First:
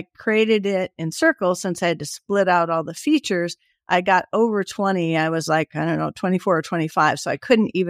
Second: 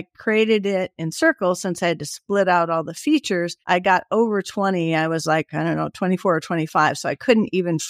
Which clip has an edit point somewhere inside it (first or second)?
second